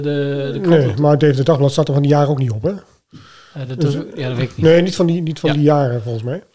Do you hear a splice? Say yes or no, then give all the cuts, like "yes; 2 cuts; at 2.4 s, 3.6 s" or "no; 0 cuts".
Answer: no; 0 cuts